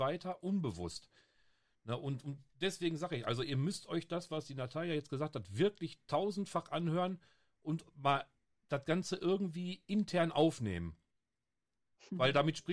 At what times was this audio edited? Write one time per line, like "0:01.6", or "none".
none